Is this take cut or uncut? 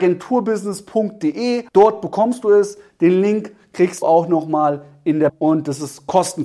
cut